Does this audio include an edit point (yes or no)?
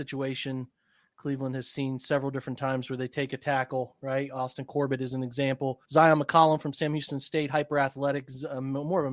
yes